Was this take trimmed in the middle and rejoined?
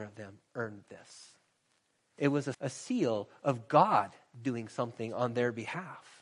yes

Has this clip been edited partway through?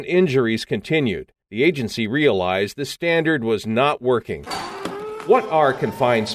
yes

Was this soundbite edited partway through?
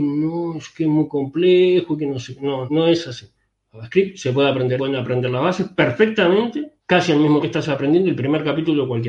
yes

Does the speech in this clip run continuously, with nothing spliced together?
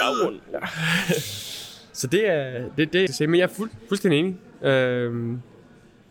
no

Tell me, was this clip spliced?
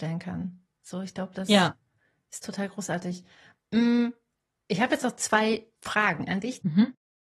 no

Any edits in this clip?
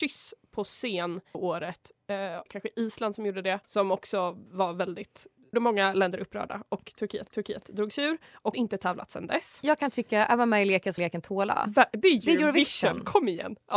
yes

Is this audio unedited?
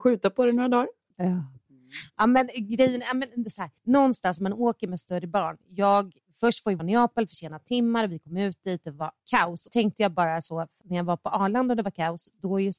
no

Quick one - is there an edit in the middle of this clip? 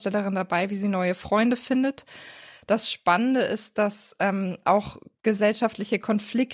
no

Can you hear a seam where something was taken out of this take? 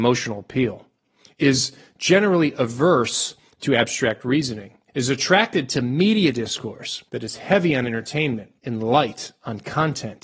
yes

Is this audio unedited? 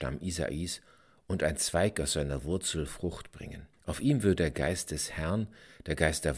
no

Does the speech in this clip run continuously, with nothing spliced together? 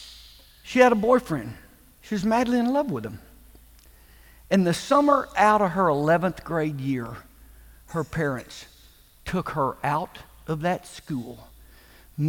yes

